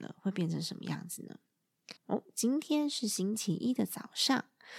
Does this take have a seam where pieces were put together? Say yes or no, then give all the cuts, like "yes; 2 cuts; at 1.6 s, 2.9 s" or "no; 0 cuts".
yes; 1 cut; at 2.0 s